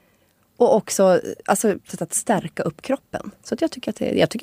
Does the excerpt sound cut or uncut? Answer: cut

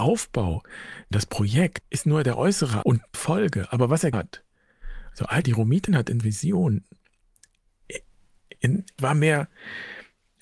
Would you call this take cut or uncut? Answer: cut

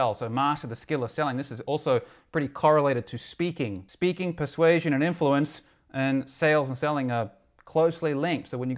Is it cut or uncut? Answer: uncut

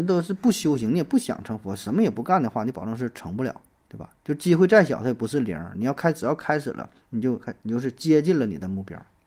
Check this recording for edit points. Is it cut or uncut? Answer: cut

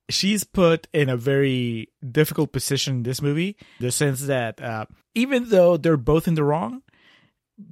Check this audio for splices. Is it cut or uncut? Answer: cut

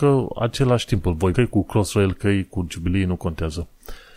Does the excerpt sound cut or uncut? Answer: cut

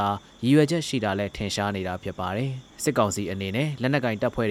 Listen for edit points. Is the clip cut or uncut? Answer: cut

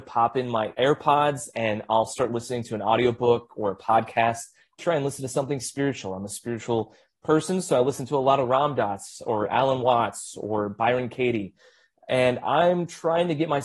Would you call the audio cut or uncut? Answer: cut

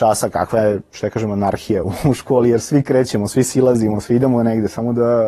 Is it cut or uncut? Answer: uncut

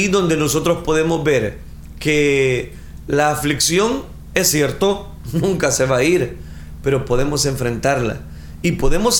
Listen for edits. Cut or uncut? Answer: uncut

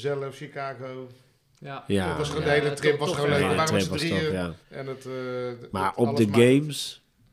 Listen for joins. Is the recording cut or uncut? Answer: cut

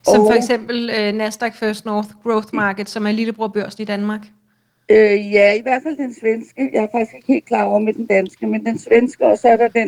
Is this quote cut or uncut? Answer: uncut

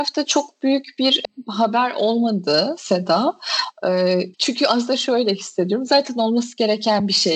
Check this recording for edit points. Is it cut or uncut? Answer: cut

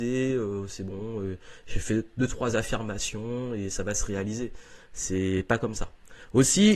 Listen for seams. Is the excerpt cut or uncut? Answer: uncut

